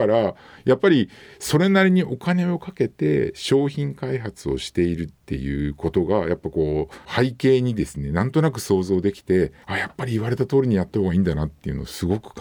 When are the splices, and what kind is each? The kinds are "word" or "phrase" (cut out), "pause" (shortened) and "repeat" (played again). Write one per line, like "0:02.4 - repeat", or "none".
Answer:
0:09.6 - pause